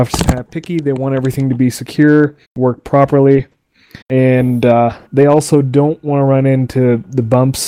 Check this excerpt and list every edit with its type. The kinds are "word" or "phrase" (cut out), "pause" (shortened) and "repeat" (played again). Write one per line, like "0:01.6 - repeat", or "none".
0:02.4 - pause
0:04.0 - pause
0:05.1 - pause